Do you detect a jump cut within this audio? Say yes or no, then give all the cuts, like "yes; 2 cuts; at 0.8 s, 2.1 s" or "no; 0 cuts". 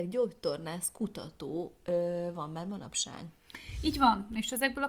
no; 0 cuts